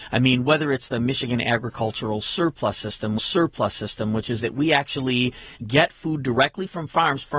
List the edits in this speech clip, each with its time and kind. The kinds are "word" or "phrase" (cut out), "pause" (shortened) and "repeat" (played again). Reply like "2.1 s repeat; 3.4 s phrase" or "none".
3.2 s repeat; 4.4 s phrase; 5.6 s pause